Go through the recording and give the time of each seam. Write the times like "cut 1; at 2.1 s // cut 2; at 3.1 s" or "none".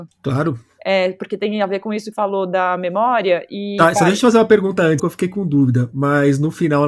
cut 1; at 2.1 s // cut 2; at 5.0 s